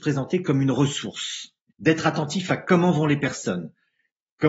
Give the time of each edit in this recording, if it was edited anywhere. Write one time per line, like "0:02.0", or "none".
0:01.7